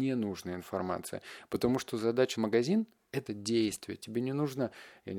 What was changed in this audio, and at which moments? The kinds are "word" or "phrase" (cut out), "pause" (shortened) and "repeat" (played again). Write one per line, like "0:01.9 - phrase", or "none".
0:02.3 - word
0:03.3 - phrase